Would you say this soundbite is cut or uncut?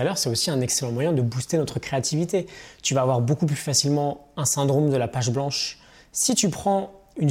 uncut